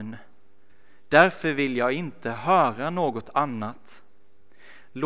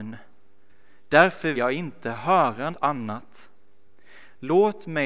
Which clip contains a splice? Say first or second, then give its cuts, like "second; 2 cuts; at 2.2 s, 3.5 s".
second; 2 cuts; at 1.5 s, 2.7 s